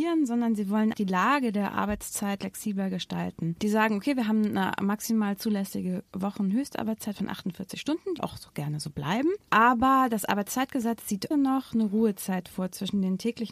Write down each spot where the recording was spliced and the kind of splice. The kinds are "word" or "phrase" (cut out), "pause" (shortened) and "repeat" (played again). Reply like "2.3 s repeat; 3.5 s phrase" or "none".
0.9 s word; 2.4 s word; 8.2 s word; 11.3 s word